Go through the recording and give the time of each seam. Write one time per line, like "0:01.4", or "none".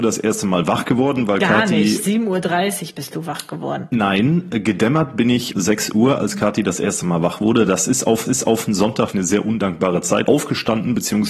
0:05.5
0:08.3
0:09.1
0:10.3